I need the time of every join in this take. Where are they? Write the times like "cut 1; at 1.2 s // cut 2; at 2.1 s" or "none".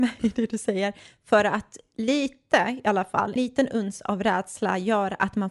cut 1; at 3.4 s